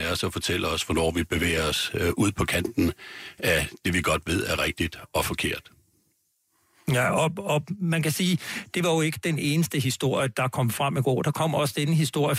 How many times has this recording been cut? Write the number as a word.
zero